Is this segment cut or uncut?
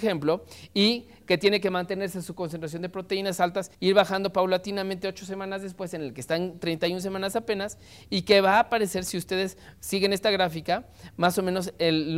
cut